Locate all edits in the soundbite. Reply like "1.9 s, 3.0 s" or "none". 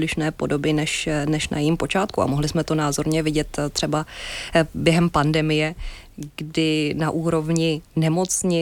none